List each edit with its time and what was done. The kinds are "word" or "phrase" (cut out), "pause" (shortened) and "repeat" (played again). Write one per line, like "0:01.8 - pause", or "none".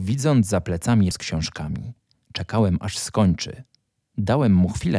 0:01.1 - word